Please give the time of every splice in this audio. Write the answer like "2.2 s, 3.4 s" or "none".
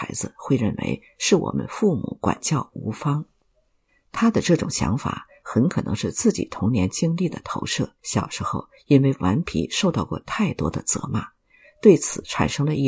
3.9 s, 8.0 s